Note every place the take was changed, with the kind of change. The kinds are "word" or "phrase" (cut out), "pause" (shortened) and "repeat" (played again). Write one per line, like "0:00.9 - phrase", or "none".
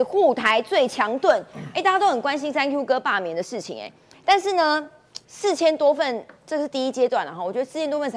0:05.2 - pause